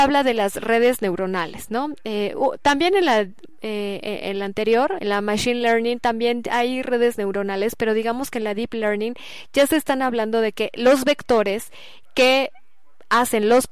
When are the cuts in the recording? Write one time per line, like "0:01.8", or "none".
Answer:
0:05.0